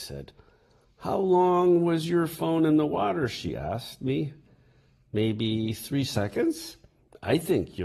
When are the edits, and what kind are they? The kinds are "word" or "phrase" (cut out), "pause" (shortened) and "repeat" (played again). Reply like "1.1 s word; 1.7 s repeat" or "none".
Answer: none